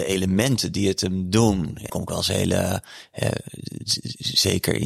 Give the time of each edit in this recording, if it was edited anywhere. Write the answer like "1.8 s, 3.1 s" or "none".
1.9 s